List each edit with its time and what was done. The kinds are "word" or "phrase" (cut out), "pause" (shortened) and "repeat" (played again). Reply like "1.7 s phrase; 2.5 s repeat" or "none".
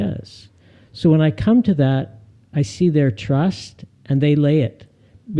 none